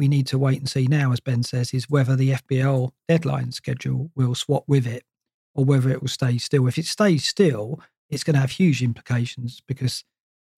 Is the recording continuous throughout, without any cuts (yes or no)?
yes